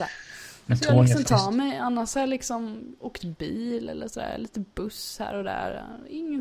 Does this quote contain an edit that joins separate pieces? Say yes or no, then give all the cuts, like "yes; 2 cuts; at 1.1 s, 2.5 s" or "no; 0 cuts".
yes; 1 cut; at 1.2 s